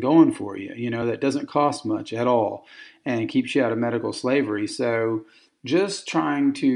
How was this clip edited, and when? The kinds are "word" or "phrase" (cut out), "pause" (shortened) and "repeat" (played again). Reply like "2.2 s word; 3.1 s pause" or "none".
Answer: none